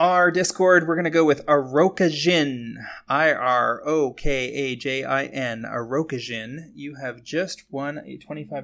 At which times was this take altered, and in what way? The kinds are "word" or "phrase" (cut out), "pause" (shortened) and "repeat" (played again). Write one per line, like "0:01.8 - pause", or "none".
none